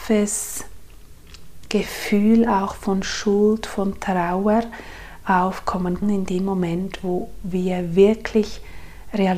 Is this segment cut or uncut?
cut